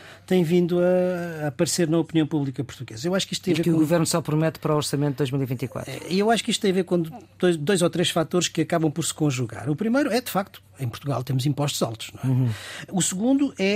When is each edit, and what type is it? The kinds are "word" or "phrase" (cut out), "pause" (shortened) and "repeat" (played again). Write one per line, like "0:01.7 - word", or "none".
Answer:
none